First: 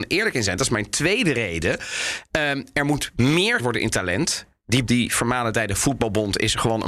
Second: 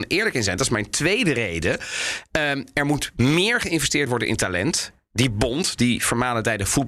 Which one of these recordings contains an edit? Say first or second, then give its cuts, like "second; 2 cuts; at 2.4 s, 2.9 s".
first; 2 cuts; at 3.6 s, 4.9 s